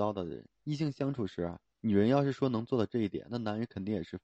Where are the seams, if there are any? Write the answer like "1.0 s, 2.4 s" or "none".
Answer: 1.7 s